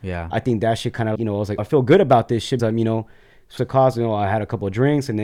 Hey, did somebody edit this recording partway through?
yes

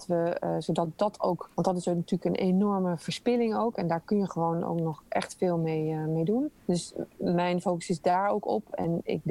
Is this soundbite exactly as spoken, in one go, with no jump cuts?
no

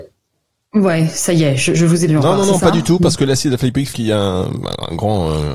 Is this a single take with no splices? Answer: no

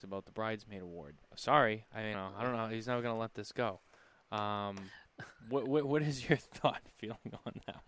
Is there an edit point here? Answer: yes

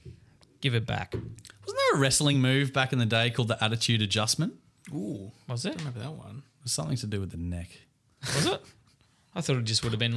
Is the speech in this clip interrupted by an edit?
no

